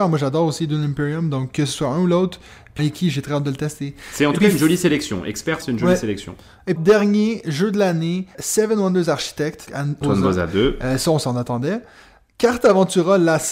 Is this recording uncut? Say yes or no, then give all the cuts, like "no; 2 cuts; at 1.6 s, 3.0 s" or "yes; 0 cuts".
no; 6 cuts; at 2.8 s, 5.6 s, 6.8 s, 8.3 s, 9.7 s, 10.0 s